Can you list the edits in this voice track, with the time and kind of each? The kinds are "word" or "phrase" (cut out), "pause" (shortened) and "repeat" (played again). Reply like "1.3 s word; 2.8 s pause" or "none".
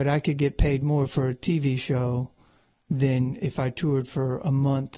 none